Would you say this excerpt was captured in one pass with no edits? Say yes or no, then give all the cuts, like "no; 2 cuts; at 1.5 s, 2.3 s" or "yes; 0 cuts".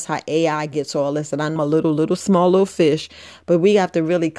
no; 1 cut; at 1.6 s